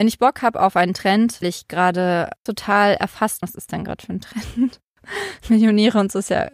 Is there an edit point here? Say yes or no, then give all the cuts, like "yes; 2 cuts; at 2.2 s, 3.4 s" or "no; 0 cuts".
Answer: yes; 3 cuts; at 1.4 s, 2.5 s, 3.4 s